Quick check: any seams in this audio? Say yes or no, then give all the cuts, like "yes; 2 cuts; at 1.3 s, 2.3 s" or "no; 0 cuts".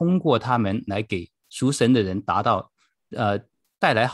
no; 0 cuts